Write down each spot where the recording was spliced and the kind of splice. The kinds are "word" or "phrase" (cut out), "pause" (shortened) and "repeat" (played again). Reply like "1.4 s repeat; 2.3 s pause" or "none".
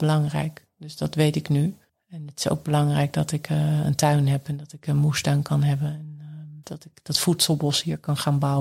1.9 s pause; 6.6 s pause